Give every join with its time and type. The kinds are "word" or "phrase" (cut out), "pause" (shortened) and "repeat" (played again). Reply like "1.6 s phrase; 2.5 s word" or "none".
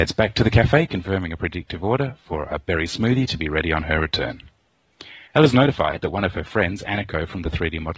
5.3 s pause